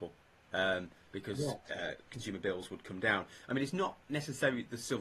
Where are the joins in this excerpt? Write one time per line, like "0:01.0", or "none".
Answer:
none

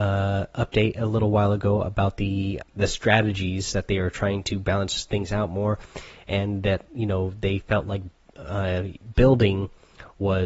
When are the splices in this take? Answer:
0:02.6

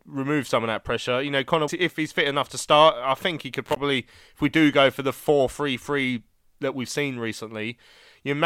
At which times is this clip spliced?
0:01.7

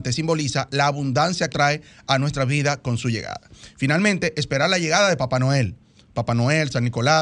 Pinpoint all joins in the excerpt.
0:01.5

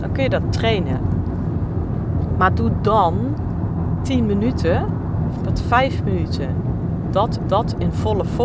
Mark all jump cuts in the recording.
0:05.4
0:07.4

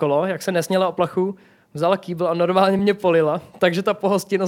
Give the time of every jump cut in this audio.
none

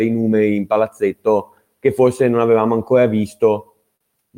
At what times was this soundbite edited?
none

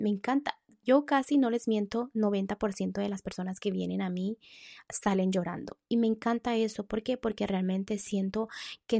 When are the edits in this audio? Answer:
none

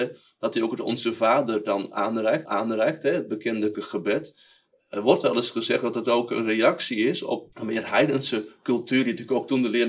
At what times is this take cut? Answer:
0:02.5
0:03.7
0:07.5

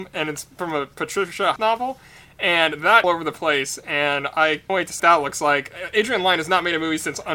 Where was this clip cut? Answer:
0:01.6
0:03.0
0:04.7
0:05.0

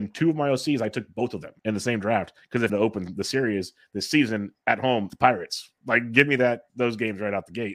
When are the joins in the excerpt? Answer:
0:01.6
0:02.4
0:02.7
0:05.1

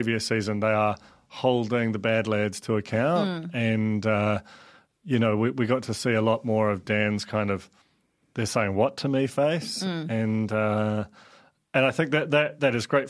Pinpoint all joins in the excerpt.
none

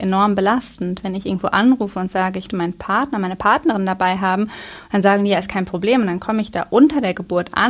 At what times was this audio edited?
0:02.5

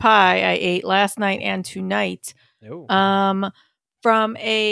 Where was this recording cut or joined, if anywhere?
none

